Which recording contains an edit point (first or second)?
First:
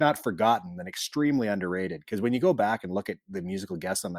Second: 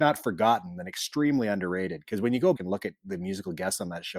second